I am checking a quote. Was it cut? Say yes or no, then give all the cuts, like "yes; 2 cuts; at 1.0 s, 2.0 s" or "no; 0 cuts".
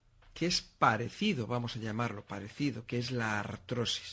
no; 0 cuts